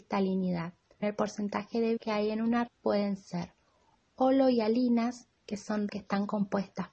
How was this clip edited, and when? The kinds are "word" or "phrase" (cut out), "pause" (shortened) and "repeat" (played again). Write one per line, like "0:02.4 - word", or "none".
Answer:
0:01.0 - word
0:02.0 - word
0:02.7 - word
0:05.9 - word